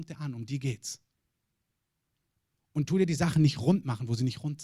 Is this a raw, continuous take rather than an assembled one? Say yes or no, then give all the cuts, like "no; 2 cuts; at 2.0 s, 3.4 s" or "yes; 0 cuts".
yes; 0 cuts